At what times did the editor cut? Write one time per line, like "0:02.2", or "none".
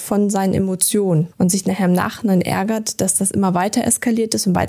0:01.3